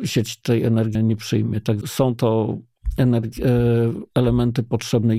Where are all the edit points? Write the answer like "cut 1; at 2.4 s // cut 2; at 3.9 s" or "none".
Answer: cut 1; at 1.0 s // cut 2; at 1.8 s